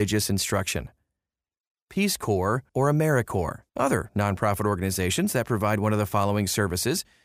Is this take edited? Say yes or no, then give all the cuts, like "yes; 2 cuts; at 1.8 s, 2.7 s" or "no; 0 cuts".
yes; 2 cuts; at 2.7 s, 3.7 s